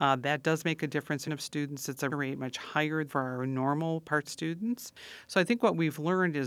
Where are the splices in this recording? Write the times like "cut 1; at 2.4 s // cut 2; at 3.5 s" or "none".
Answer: cut 1; at 1.2 s // cut 2; at 2.1 s // cut 3; at 3.1 s // cut 4; at 4.2 s